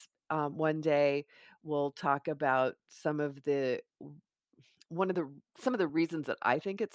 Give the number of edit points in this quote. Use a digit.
0